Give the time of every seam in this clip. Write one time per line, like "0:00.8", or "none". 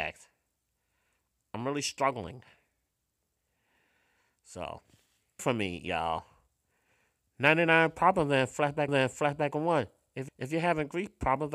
0:05.4
0:08.9
0:10.3